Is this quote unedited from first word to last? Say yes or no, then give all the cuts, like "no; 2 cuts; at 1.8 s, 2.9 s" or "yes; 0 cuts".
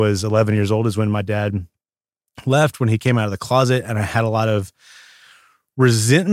yes; 0 cuts